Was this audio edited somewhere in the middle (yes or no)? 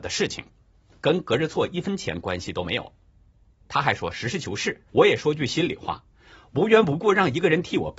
yes